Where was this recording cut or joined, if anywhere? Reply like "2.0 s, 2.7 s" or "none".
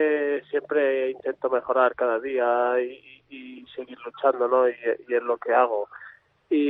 none